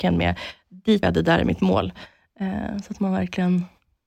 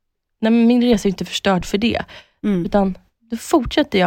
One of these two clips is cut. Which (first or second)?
first